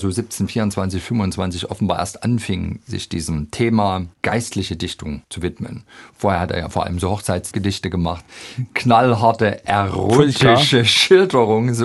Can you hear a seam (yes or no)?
no